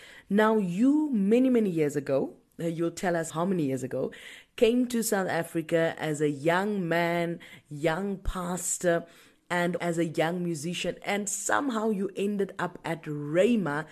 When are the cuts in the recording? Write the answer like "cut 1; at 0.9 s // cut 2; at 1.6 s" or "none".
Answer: cut 1; at 3.3 s // cut 2; at 9.8 s